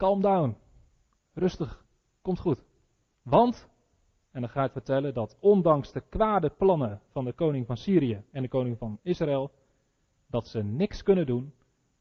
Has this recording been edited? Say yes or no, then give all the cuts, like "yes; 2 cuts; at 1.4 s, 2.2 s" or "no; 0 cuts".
yes; 1 cut; at 4.7 s